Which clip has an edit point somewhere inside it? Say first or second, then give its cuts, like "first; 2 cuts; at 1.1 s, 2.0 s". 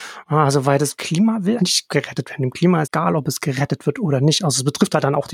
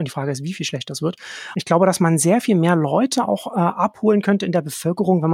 first; 2 cuts; at 1.6 s, 2.8 s